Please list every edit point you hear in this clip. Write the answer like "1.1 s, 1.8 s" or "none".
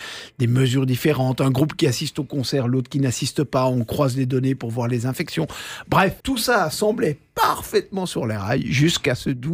6.2 s